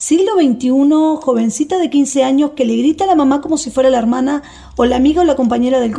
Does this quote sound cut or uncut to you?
uncut